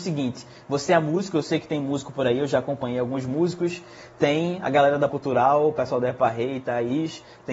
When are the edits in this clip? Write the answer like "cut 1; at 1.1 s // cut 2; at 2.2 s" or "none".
cut 1; at 5.1 s